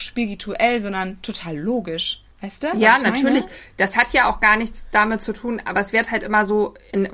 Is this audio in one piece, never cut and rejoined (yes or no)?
no